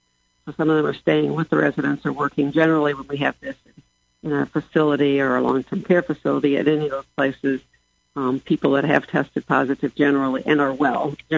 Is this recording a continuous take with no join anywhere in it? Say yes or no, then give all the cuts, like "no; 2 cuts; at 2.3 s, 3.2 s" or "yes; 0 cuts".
yes; 0 cuts